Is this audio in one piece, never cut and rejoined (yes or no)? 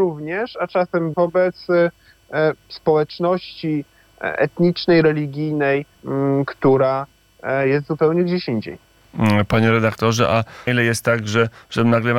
no